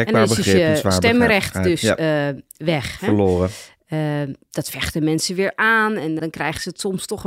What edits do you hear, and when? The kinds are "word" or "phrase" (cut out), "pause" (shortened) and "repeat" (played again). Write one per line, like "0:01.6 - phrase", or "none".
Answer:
0:06.2 - word